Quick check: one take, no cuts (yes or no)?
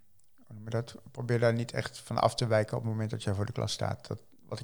yes